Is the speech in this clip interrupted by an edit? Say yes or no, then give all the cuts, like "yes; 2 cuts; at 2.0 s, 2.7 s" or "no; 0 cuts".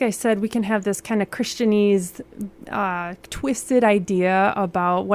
no; 0 cuts